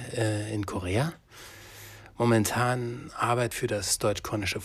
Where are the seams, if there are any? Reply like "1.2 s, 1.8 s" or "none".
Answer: 3.5 s